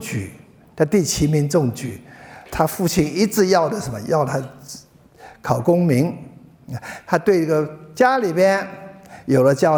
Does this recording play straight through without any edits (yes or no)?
no